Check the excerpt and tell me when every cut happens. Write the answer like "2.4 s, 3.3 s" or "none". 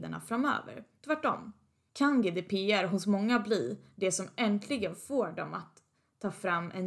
none